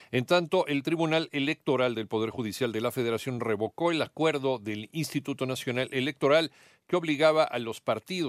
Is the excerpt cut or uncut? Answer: uncut